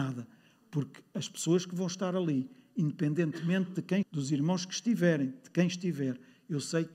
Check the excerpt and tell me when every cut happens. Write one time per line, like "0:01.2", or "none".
0:04.0

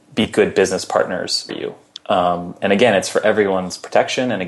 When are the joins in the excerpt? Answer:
0:01.5
0:02.6

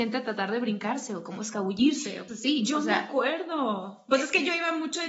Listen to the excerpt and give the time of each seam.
0:02.3

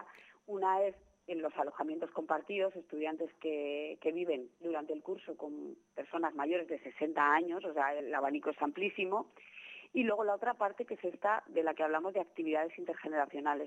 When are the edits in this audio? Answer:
0:08.0

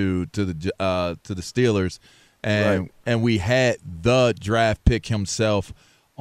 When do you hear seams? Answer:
none

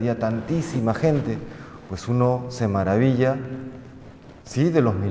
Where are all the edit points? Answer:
none

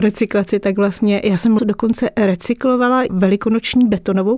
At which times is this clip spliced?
0:01.6
0:03.1

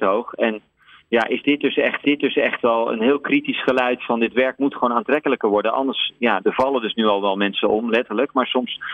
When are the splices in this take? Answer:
0:02.0
0:06.4

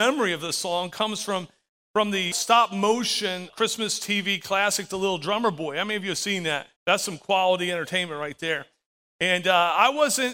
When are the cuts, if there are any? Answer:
0:02.3
0:03.5
0:06.8

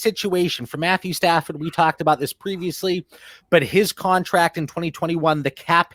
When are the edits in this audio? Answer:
none

